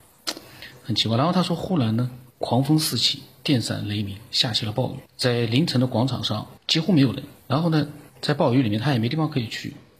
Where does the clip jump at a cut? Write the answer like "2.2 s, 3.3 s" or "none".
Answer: 2.3 s, 5.1 s, 6.6 s, 7.4 s, 8.1 s